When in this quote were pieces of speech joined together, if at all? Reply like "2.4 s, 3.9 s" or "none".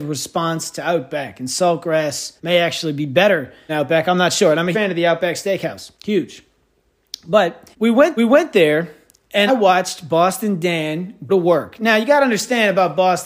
2.4 s, 3.7 s, 4.7 s, 6.0 s, 7.7 s, 8.2 s, 9.5 s, 11.3 s